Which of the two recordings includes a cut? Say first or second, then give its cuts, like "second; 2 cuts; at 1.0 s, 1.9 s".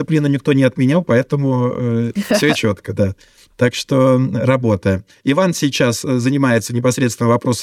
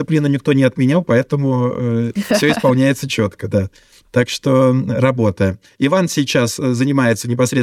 first; 1 cut; at 2.5 s